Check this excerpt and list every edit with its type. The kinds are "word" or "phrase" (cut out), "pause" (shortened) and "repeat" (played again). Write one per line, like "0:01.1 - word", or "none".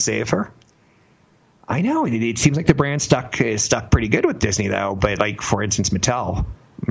none

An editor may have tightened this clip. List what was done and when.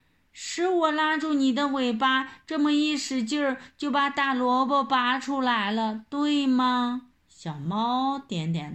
0:07.2 - pause

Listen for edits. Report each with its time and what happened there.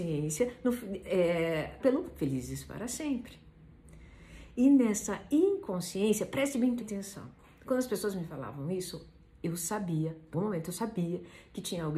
0:01.8 - word
0:06.8 - word
0:10.3 - word

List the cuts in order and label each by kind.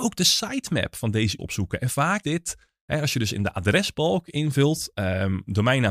0:01.4 - word
0:02.2 - word

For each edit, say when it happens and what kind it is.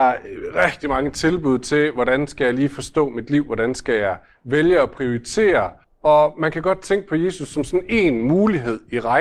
0:05.8 - pause

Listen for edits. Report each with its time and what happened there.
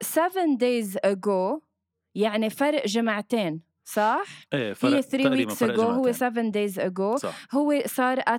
none

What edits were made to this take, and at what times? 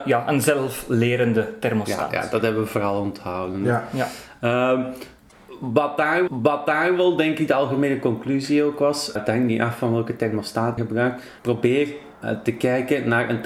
0:06.3 - repeat
0:09.2 - word
0:10.8 - phrase
0:11.4 - pause

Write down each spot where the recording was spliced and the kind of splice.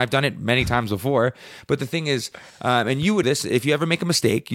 0:03.2 - word

